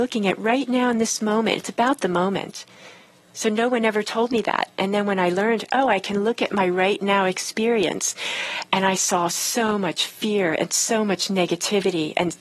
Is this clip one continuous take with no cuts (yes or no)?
yes